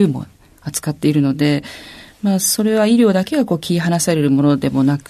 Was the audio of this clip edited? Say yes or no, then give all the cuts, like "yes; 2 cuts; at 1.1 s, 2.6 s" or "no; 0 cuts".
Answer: no; 0 cuts